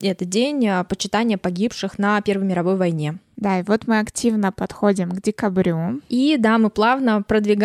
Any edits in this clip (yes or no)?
no